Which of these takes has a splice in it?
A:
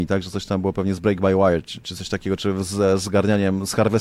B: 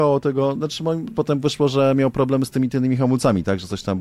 B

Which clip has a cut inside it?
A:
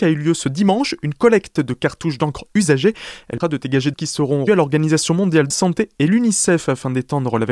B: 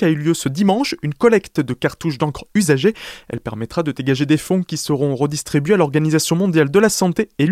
A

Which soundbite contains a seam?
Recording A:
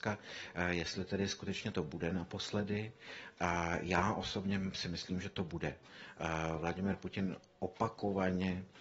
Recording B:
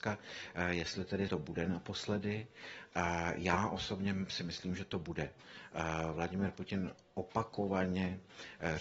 B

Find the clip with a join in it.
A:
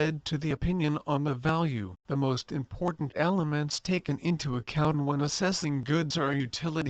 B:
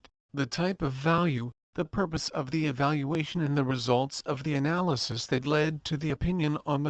A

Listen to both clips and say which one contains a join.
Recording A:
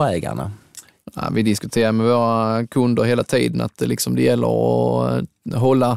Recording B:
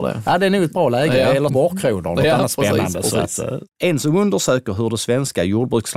B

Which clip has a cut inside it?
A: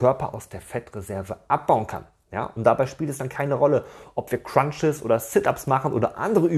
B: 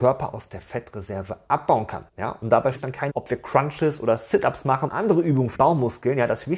B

